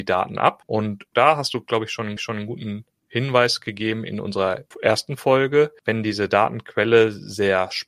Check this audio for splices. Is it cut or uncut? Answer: cut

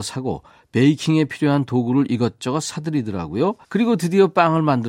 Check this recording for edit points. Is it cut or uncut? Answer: cut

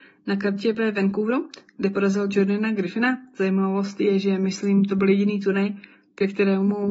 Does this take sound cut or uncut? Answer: uncut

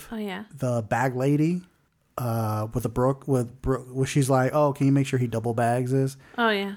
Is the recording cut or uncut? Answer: cut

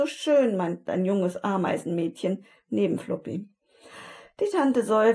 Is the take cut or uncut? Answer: uncut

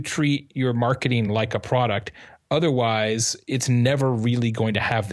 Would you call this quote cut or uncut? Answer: uncut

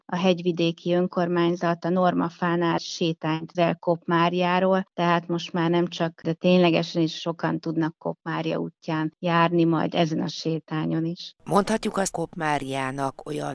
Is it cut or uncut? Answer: cut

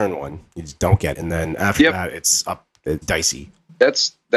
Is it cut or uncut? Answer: cut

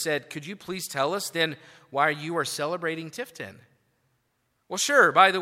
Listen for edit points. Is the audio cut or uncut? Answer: uncut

